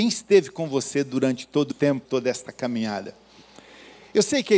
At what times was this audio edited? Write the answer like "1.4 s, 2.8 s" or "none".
1.7 s, 2.0 s